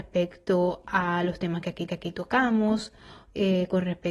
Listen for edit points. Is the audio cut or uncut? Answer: cut